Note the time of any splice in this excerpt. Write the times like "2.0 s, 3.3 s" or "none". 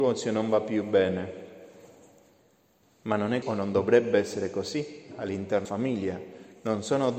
3.4 s, 5.6 s